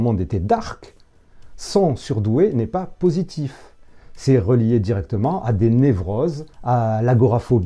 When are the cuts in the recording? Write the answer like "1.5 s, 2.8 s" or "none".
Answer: 6.5 s